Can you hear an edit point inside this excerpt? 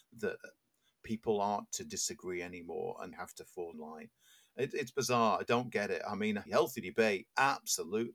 yes; 4 cuts; at 1.7 s, 3.1 s, 3.7 s, 6.5 s

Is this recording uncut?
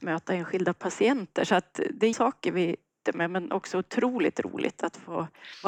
no; 2 cuts; at 2.1 s, 3.1 s

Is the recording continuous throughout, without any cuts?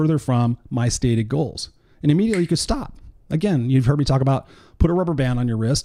yes; 0 cuts

